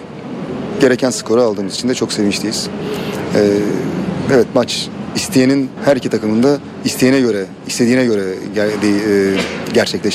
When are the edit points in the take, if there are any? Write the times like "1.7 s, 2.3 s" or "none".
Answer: 5.8 s